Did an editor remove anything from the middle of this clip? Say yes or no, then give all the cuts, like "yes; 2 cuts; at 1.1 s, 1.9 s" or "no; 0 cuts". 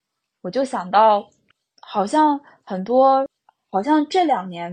no; 0 cuts